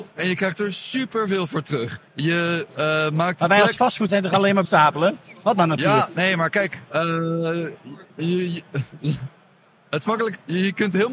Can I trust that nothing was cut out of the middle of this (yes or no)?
no